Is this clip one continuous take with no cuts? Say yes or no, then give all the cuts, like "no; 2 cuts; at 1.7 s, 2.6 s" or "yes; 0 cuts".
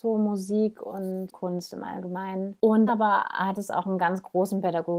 no; 2 cuts; at 1.3 s, 2.9 s